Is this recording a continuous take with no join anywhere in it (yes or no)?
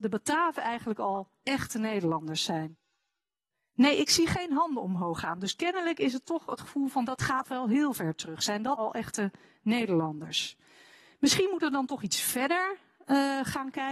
no